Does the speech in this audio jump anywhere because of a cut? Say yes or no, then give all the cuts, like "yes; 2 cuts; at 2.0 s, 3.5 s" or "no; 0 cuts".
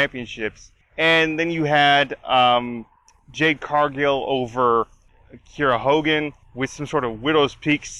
no; 0 cuts